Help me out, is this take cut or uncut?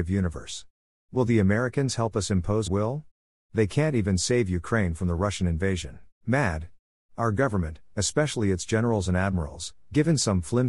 cut